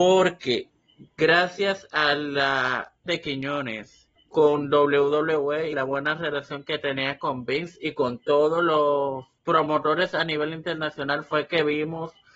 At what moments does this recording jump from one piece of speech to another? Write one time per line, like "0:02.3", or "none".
0:03.1
0:04.2
0:05.7
0:09.4